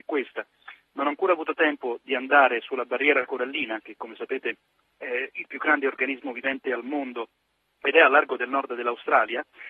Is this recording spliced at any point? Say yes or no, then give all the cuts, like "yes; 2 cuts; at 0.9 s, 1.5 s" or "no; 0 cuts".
no; 0 cuts